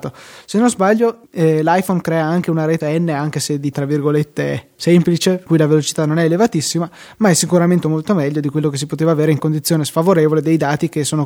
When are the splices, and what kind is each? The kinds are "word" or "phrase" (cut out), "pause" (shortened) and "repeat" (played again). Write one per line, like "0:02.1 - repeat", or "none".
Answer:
0:01.2 - pause
0:02.8 - word
0:03.7 - word
0:05.5 - word
0:07.8 - word
0:09.4 - word